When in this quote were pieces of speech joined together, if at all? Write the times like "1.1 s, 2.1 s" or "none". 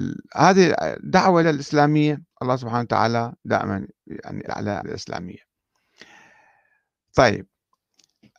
1.4 s, 2.3 s, 3.4 s, 4.5 s, 4.8 s